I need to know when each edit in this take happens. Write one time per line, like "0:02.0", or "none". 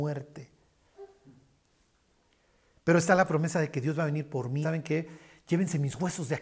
0:04.6